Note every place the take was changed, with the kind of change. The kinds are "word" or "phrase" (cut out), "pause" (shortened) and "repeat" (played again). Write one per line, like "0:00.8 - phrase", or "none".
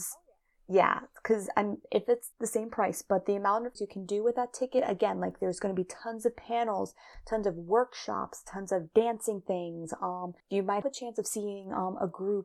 0:02.3 - pause
0:03.8 - word
0:10.4 - pause
0:10.8 - word